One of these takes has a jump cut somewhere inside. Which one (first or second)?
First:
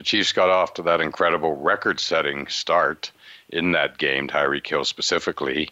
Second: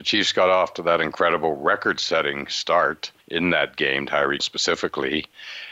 second